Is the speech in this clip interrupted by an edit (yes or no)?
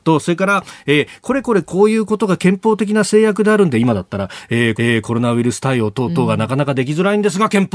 yes